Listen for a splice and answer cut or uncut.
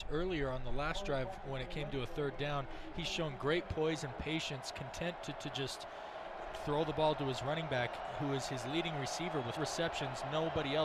cut